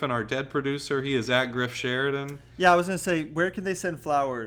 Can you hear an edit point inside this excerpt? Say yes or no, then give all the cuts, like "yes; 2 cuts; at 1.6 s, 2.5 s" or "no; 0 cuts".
no; 0 cuts